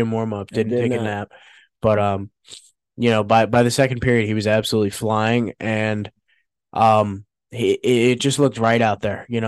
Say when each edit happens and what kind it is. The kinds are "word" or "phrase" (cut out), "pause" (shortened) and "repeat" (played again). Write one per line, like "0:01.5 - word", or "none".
none